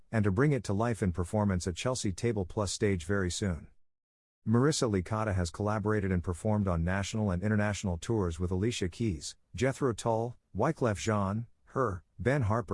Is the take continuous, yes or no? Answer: yes